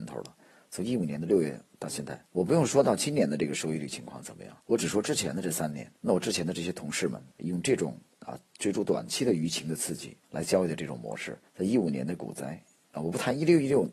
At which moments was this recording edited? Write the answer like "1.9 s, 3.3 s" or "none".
2.3 s, 4.6 s, 6.0 s, 7.3 s, 10.2 s, 11.5 s

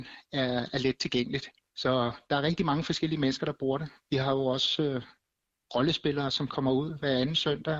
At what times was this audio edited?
none

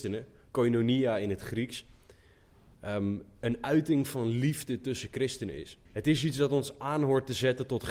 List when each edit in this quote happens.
5.8 s

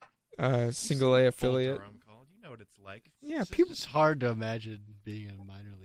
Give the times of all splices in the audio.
none

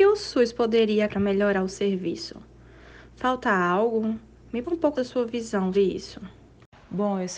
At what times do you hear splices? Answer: 1.1 s, 1.7 s, 4.6 s, 4.9 s, 5.7 s

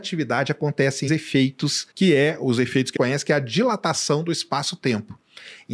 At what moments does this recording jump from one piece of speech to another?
1.1 s, 1.9 s, 3.0 s

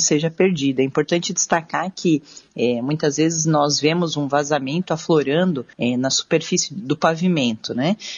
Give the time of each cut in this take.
5.7 s

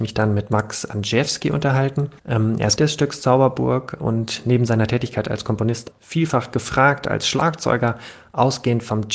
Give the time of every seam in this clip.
2.2 s, 2.8 s, 5.9 s

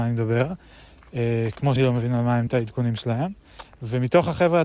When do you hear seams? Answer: 1.8 s, 2.5 s

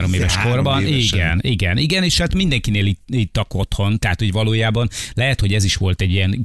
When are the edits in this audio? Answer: none

